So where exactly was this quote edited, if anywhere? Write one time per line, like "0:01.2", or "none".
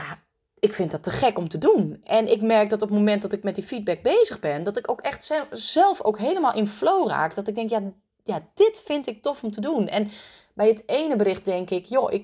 none